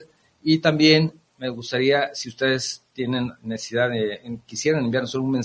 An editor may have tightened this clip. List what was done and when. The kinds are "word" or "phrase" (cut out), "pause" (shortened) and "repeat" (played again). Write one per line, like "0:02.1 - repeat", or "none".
0:03.4 - pause